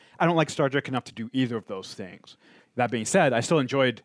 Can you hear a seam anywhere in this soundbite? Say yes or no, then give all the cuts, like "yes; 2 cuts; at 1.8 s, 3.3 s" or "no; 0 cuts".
no; 0 cuts